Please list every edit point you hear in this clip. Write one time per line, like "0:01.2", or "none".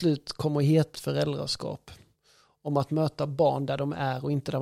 0:00.9